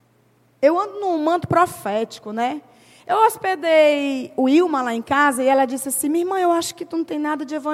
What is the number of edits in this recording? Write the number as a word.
zero